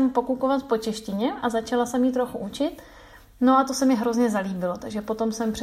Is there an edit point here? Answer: no; 0 cuts

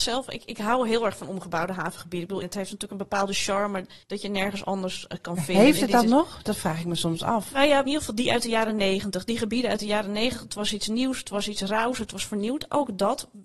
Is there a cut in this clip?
yes; 3 cuts; at 2.4 s, 4.0 s, 7.9 s

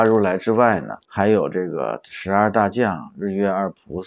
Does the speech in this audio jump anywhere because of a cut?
yes; 1 cut; at 1.0 s

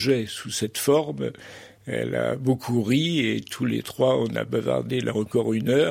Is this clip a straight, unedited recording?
yes; 0 cuts

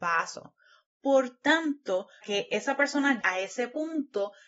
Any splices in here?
yes; 2 cuts; at 2.2 s, 3.2 s

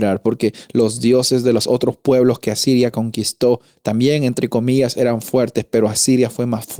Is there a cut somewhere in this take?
no; 0 cuts

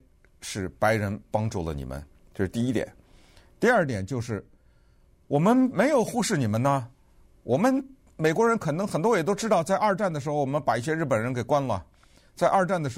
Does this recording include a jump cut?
no; 0 cuts

